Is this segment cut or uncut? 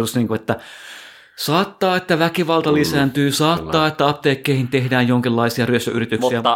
uncut